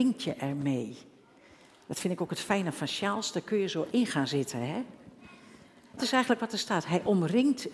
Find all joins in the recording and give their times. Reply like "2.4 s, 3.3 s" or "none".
6.0 s